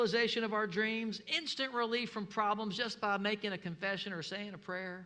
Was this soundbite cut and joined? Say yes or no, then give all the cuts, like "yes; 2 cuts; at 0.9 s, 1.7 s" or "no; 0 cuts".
no; 0 cuts